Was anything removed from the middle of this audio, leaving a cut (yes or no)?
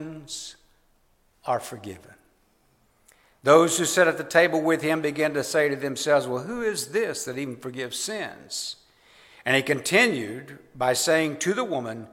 no